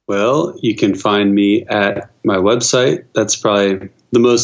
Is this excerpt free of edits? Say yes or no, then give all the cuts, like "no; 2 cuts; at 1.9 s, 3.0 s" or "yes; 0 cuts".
yes; 0 cuts